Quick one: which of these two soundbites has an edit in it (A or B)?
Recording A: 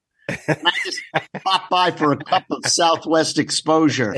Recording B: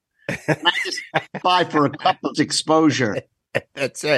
B